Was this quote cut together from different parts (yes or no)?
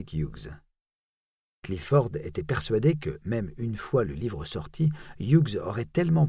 no